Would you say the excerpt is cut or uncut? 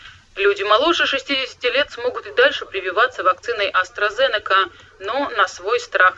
uncut